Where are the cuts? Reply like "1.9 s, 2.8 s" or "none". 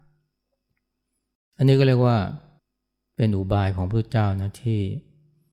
2.6 s

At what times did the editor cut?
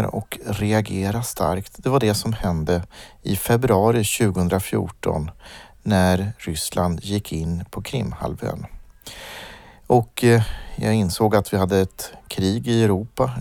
none

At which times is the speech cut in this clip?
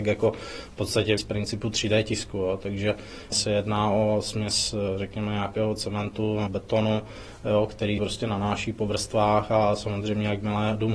1.2 s, 3.3 s, 6.5 s, 8.0 s

